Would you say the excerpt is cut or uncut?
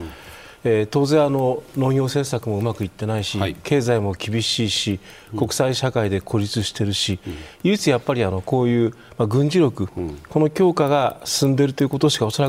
uncut